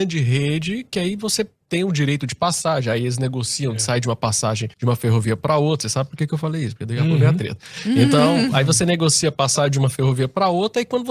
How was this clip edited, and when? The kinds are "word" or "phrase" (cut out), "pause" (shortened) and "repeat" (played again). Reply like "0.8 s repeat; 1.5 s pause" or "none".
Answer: 4.7 s pause